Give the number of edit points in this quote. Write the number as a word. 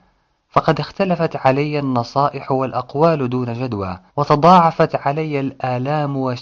one